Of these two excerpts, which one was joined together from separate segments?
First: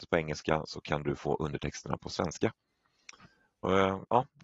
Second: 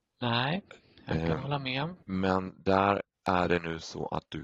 second; 2 cuts; at 2.0 s, 3.1 s

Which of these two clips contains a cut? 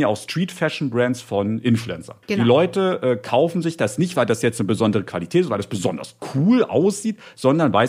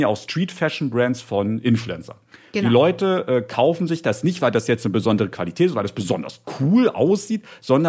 first; 1 cut; at 2.2 s

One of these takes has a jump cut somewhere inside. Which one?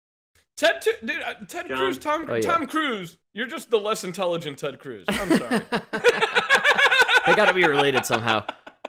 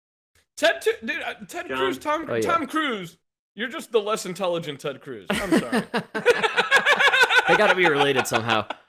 first; 1 cut; at 3.2 s

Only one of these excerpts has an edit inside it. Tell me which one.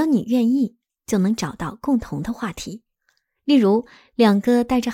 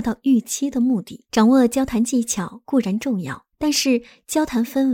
second; 2 cuts; at 1.3 s, 3.5 s

